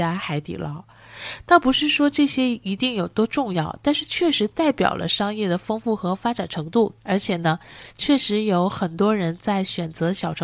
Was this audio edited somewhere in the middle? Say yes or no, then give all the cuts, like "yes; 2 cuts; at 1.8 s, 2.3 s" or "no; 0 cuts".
yes; 1 cut; at 7.0 s